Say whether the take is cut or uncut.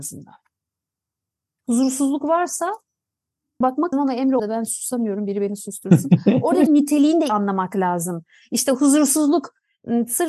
cut